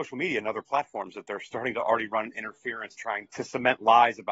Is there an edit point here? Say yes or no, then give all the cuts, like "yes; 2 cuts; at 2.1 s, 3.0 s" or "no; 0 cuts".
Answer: yes; 2 cuts; at 3.0 s, 3.3 s